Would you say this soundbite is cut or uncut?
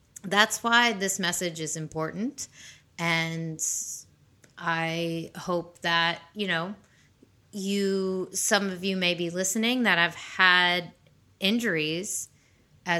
uncut